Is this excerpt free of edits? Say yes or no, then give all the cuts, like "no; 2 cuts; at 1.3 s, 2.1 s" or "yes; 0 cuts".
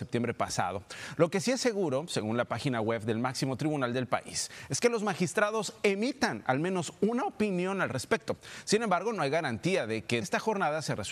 no; 1 cut; at 10.2 s